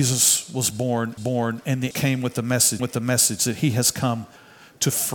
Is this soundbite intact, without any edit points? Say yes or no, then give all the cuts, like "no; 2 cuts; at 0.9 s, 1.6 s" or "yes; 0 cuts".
no; 3 cuts; at 1.2 s, 1.9 s, 2.8 s